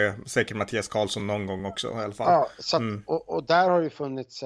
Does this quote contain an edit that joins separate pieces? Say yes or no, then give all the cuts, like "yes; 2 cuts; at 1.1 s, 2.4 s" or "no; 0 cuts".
no; 0 cuts